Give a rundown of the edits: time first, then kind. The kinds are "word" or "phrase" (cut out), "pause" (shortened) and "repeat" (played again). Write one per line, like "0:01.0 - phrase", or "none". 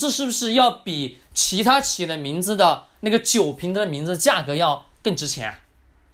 none